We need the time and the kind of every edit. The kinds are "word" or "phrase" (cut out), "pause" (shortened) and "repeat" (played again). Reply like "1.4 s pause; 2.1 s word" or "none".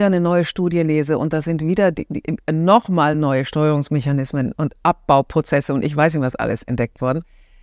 none